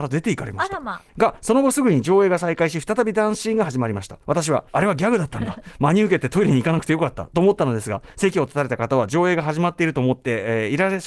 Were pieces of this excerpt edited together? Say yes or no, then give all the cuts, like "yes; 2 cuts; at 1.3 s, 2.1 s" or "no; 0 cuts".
yes; 3 cuts; at 1.1 s, 4.2 s, 4.7 s